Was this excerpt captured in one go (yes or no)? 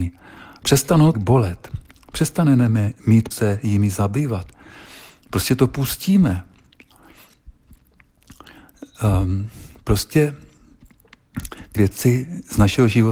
no